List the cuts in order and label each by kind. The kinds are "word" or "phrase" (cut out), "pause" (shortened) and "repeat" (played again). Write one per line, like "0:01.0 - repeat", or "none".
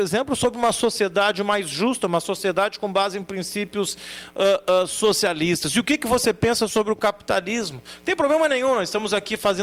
none